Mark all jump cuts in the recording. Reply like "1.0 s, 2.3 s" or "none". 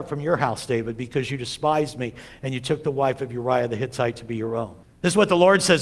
4.8 s